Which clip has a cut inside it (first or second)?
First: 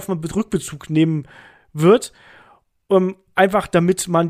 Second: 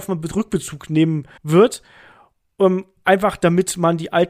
second